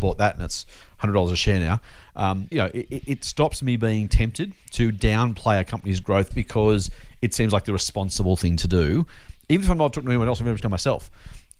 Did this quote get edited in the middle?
yes; 3 cuts; at 2.5 s, 6.3 s, 10.6 s

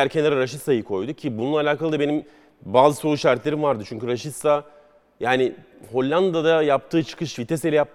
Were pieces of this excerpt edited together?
no; 0 cuts

